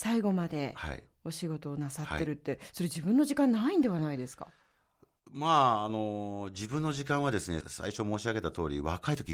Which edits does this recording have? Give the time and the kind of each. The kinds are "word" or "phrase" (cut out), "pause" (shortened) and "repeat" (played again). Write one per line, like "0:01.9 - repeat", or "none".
none